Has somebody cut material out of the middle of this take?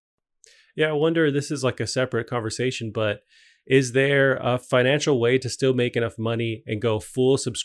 no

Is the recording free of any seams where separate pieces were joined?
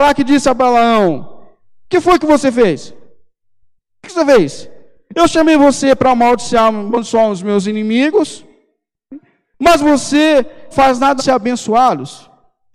no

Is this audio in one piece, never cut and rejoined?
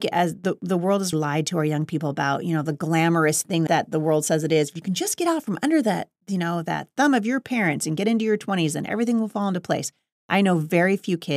no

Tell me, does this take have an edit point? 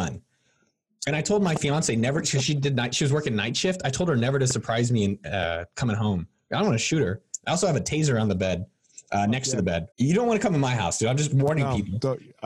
yes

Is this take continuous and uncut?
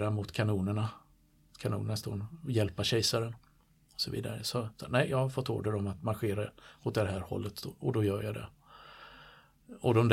yes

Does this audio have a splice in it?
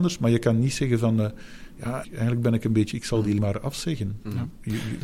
yes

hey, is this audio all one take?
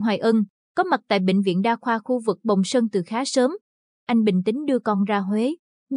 yes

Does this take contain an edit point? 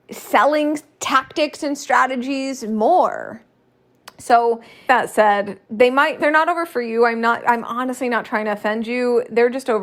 yes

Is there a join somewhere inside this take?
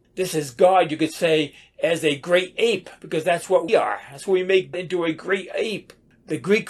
yes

